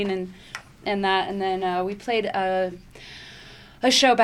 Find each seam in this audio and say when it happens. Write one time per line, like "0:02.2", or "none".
none

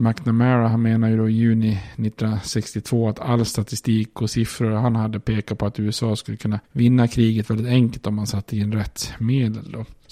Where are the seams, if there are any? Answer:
none

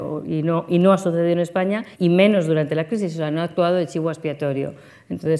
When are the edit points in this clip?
0:01.9

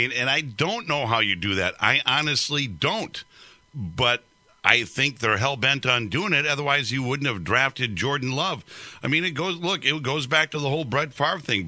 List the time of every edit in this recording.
none

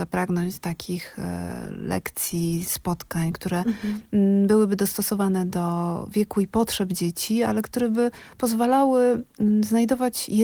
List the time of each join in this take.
0:02.6

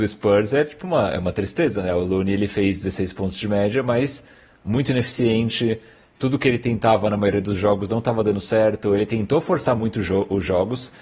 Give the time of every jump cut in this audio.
none

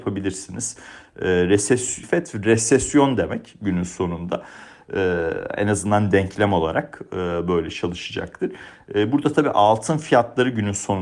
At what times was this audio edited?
0:02.0

